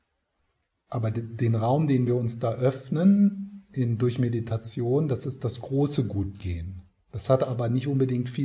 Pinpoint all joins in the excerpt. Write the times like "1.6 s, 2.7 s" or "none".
7.0 s